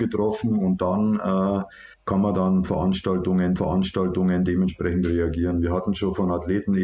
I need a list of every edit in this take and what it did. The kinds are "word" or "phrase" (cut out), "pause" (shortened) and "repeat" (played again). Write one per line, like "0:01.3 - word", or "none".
0:01.9 - pause
0:03.6 - repeat